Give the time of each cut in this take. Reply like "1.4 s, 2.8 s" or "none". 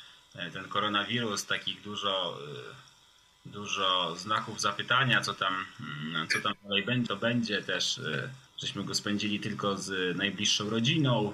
7.1 s, 8.5 s